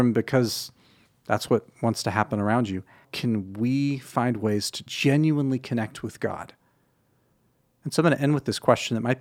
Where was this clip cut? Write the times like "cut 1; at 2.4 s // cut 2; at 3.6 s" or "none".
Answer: cut 1; at 1.0 s // cut 2; at 3.0 s // cut 3; at 4.9 s